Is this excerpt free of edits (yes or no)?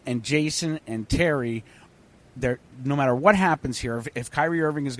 yes